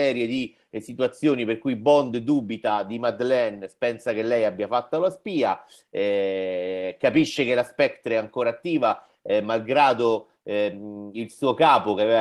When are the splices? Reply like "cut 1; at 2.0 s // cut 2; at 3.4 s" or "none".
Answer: none